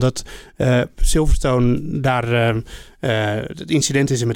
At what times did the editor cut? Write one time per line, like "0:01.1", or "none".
none